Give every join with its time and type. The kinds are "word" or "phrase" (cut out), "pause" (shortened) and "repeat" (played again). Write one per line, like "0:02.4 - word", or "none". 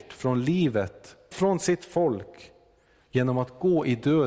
0:01.3 - word